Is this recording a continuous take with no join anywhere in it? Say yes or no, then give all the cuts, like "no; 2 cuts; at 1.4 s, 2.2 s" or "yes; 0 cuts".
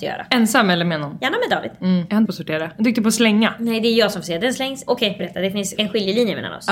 no; 2 cuts; at 2.3 s, 5.2 s